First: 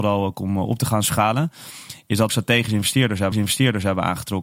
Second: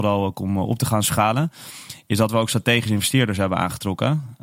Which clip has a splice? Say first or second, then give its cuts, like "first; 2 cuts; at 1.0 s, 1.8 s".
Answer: first; 2 cuts; at 2.3 s, 3.3 s